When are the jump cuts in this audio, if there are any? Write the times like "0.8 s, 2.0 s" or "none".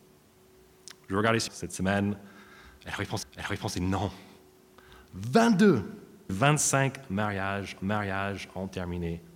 1.5 s, 3.2 s, 6.3 s, 7.8 s

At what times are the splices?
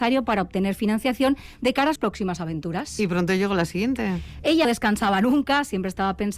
2.0 s, 4.6 s

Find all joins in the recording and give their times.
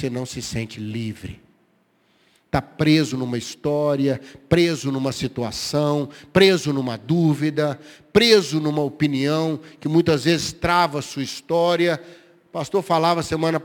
none

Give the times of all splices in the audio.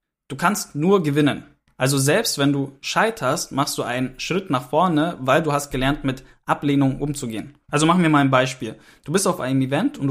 7.6 s

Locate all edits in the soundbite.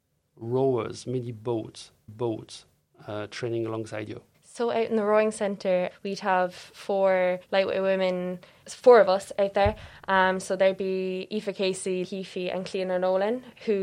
2.1 s, 4.3 s, 5.9 s, 7.4 s, 8.6 s, 12.0 s

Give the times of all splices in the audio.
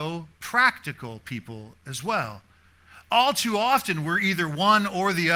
none

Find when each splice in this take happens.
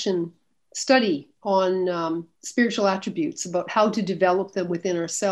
2.3 s

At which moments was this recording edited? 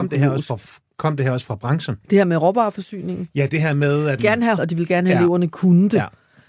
2.0 s, 4.2 s, 4.6 s

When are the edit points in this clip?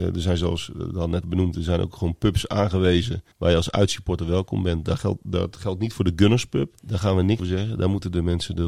1.2 s, 3.3 s, 6.8 s, 7.4 s

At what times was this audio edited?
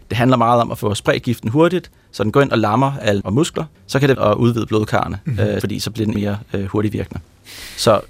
3.2 s, 3.7 s, 4.1 s, 5.6 s, 6.1 s

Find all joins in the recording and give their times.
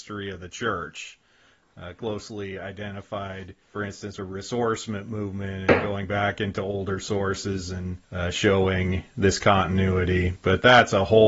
3.6 s, 4.2 s, 8.0 s

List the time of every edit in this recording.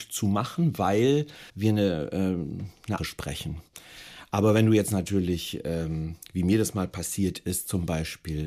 1.5 s, 3.0 s

